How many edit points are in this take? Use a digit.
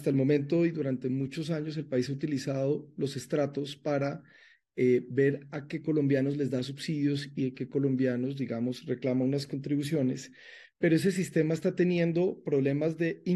0